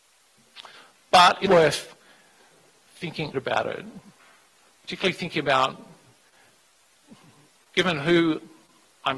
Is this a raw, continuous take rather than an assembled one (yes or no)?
no